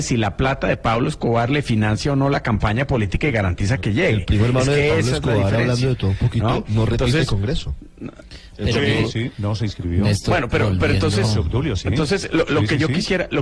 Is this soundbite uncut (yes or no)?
yes